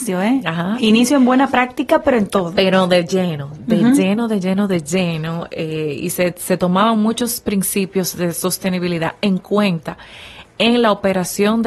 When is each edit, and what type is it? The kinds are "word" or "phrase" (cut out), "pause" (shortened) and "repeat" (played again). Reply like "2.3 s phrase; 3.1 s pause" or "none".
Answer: none